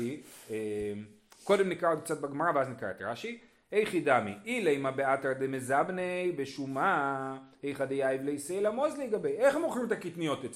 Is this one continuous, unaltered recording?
yes; 0 cuts

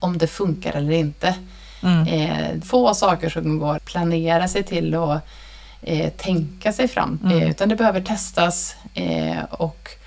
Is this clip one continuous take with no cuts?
no; 3 cuts; at 2.6 s, 3.8 s, 7.2 s

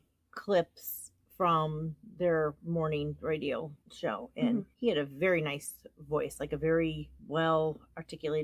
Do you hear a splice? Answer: yes; 3 cuts; at 3.8 s, 4.7 s, 7.2 s

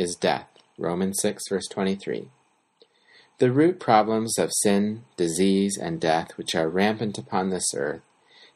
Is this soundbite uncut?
yes; 0 cuts

